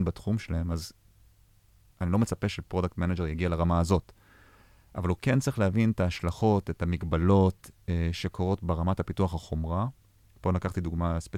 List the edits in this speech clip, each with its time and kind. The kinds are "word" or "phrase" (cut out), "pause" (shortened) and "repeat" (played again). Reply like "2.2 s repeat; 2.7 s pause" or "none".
none